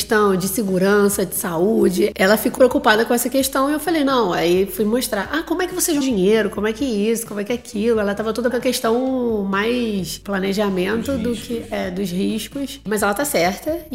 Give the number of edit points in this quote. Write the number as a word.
three